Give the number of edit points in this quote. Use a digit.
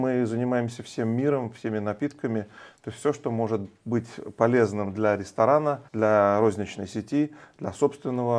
1